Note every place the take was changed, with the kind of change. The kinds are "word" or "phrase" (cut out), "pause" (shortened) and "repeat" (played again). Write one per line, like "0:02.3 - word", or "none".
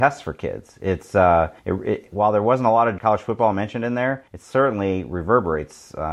0:01.6 - pause
0:03.0 - word
0:04.3 - pause